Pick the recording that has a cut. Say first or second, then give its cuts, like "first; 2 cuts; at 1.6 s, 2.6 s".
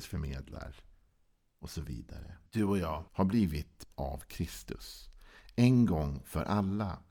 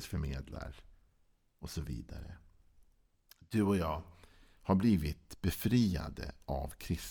first; 3 cuts; at 2.5 s, 3.1 s, 3.9 s